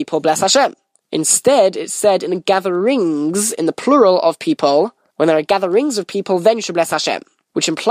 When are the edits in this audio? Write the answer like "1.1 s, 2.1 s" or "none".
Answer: none